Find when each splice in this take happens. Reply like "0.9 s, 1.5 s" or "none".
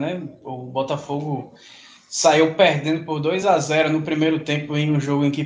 none